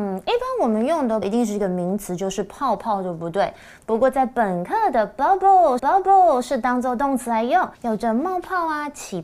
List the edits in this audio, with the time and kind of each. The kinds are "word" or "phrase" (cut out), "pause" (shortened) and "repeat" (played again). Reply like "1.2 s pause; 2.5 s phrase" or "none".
1.2 s word; 5.8 s repeat; 7.7 s pause